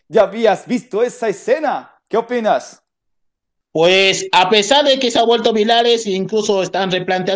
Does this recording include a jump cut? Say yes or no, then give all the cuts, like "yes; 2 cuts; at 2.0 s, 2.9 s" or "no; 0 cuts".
no; 0 cuts